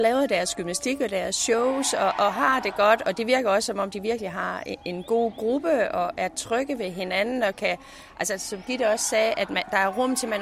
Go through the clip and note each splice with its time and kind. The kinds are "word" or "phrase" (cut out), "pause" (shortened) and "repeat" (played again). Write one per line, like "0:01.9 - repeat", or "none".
none